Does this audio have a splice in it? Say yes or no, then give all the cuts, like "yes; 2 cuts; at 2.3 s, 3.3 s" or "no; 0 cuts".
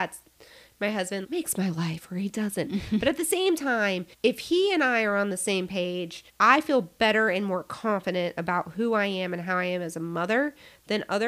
yes; 3 cuts; at 1.2 s, 4.1 s, 6.3 s